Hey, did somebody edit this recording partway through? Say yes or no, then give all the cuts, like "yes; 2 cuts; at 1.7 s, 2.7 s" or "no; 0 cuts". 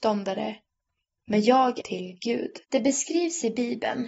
yes; 2 cuts; at 1.8 s, 2.6 s